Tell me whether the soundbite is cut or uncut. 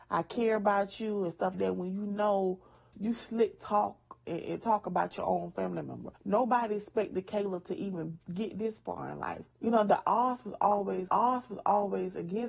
cut